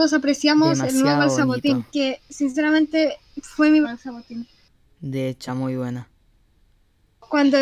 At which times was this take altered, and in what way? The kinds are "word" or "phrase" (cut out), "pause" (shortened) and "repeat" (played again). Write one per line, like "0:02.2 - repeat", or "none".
0:01.9 - pause
0:03.8 - phrase
0:04.8 - pause
0:05.5 - phrase